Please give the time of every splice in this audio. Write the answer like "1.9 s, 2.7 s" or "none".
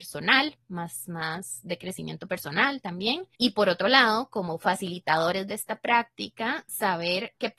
3.3 s